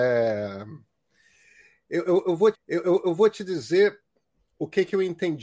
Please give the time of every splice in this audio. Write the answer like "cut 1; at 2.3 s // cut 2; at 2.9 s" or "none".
cut 1; at 2.5 s